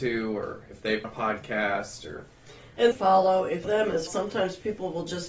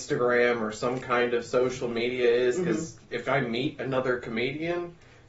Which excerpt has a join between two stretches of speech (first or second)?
first